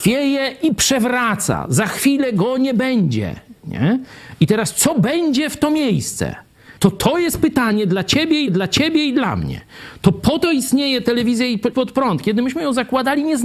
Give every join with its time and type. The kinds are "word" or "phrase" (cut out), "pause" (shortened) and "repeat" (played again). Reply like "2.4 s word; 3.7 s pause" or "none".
6.8 s pause; 8.5 s repeat; 11.7 s word